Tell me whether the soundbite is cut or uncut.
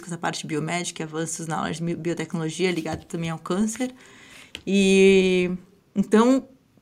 uncut